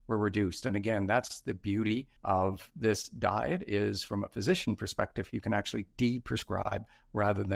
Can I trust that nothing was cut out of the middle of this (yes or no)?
no